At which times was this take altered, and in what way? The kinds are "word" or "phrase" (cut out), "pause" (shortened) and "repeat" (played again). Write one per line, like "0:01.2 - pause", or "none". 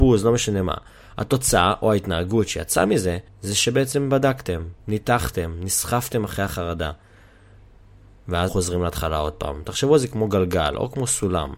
0:03.3 - pause
0:04.8 - pause
0:08.5 - word